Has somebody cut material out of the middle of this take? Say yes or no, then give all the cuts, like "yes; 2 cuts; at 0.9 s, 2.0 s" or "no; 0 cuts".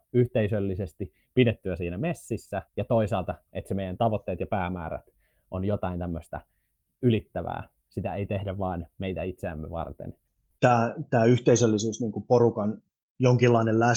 yes; 2 cuts; at 2.7 s, 7.0 s